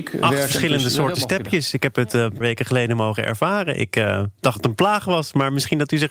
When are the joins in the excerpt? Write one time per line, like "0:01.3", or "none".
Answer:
0:02.4
0:04.6